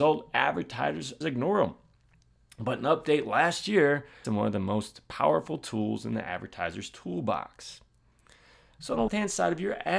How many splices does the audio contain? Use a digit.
3